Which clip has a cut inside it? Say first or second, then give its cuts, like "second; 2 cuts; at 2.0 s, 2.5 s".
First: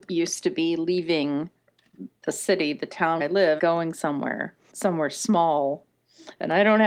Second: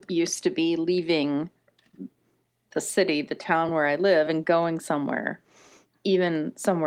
first; 4 cuts; at 2.2 s, 3.2 s, 3.6 s, 4.7 s